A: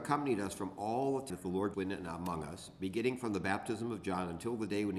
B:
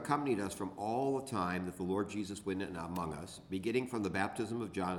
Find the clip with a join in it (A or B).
A